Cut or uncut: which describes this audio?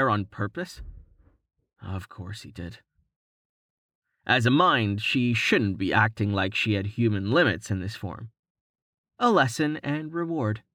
uncut